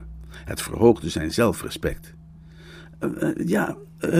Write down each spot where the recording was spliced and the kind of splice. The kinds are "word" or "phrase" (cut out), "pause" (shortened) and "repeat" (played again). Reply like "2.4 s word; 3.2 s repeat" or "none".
none